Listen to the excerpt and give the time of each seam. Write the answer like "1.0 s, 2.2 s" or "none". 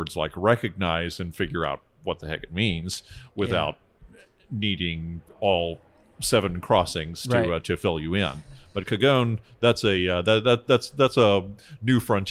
none